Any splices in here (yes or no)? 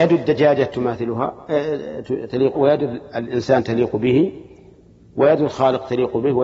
yes